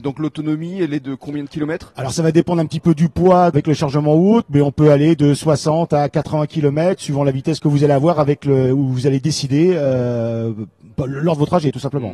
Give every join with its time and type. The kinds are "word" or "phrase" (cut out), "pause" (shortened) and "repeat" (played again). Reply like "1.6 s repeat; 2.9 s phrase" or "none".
none